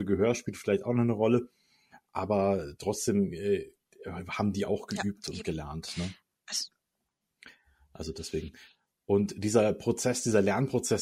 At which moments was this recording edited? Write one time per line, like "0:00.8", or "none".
none